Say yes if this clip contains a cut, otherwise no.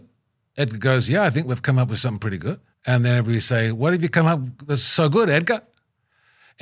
yes